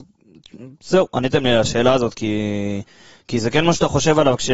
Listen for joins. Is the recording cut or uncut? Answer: uncut